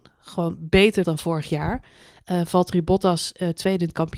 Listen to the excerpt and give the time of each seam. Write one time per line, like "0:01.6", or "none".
0:01.0

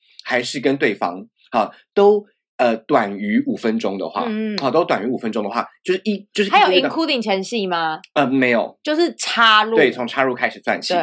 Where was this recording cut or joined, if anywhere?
none

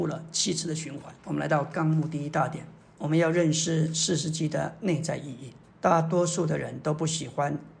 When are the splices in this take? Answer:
0:01.2
0:02.8
0:05.6

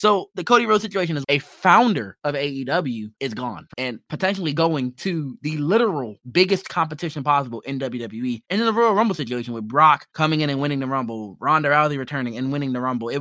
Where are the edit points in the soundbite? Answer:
0:01.2
0:03.7

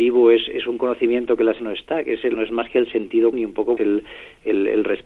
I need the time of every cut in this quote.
0:01.6
0:02.3
0:03.3
0:03.8

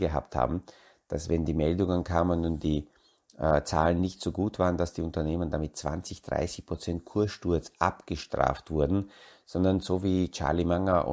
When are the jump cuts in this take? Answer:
none

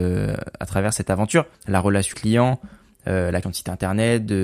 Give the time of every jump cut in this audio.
0:01.5
0:02.1
0:03.4

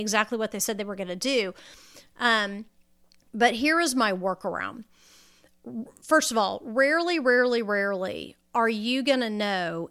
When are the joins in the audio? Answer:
none

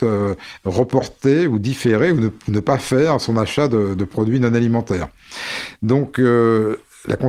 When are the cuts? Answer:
0:02.4

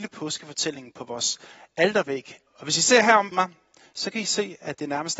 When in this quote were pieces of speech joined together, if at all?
0:02.5
0:03.3

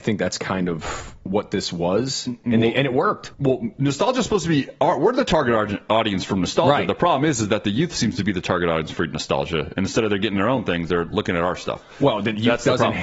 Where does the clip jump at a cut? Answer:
0:03.3

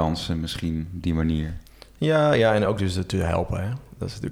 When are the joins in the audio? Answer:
none

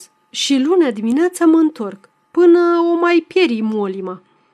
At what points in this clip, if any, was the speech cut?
none

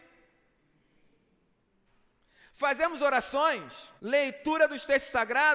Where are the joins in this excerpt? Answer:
0:04.0

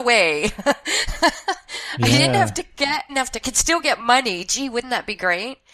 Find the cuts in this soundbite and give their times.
0:03.1
0:03.4

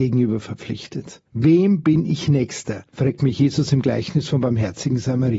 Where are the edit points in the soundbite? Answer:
0:01.3
0:02.9

